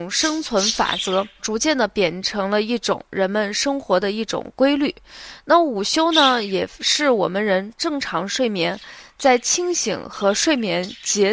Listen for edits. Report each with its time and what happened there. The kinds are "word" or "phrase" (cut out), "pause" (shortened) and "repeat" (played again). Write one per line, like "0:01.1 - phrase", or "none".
0:01.4 - word